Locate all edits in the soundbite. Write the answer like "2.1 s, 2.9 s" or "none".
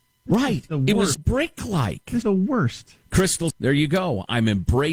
1.1 s, 2.2 s, 3.5 s